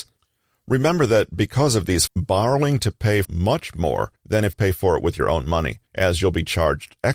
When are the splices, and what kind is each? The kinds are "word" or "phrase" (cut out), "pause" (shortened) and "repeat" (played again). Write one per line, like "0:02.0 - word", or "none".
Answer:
0:02.1 - word
0:03.2 - phrase
0:04.2 - pause
0:04.5 - phrase
0:05.9 - pause